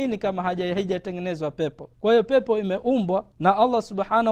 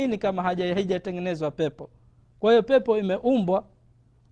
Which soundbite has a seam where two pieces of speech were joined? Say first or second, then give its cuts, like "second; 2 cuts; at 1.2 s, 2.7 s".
first; 2 cuts; at 1.9 s, 3.3 s